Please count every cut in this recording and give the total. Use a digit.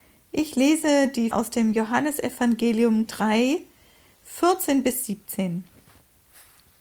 2